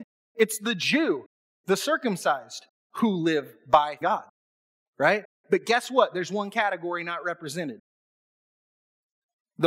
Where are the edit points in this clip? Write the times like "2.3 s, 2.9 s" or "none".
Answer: 4.0 s